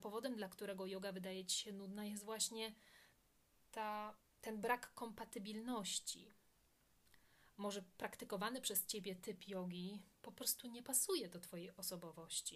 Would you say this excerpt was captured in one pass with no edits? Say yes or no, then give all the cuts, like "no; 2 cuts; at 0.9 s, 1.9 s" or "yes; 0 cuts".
yes; 0 cuts